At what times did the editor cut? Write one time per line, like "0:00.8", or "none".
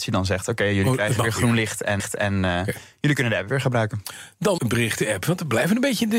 0:02.0
0:04.6